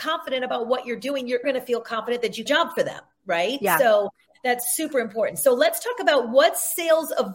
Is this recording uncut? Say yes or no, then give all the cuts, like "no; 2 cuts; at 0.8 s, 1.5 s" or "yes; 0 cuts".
no; 2 cuts; at 1.4 s, 2.5 s